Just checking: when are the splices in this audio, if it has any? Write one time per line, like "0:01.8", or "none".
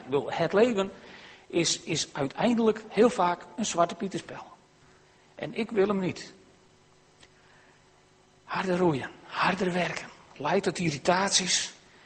none